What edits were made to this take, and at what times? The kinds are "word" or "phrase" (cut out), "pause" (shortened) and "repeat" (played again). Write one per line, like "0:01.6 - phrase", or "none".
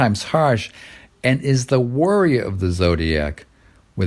none